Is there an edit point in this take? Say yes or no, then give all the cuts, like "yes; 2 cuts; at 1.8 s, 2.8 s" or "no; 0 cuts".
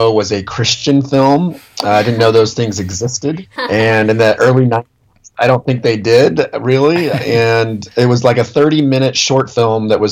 no; 0 cuts